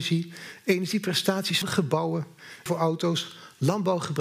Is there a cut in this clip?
yes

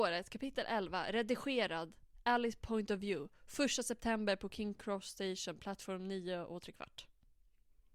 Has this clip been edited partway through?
no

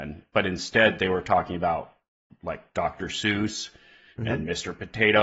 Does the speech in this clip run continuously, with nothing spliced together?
yes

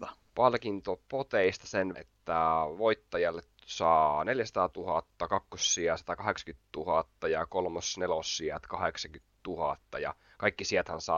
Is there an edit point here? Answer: yes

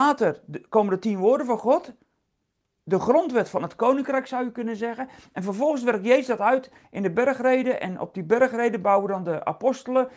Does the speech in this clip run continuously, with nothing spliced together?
yes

